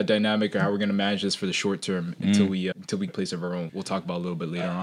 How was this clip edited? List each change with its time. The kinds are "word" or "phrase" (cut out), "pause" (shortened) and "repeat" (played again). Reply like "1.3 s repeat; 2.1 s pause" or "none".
2.7 s word; 3.1 s word; 3.7 s word